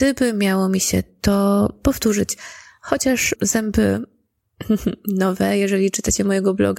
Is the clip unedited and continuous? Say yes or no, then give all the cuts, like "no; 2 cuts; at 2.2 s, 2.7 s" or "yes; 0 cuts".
no; 1 cut; at 3.3 s